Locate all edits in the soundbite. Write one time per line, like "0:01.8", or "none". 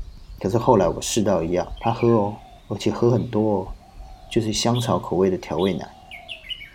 0:01.8
0:02.6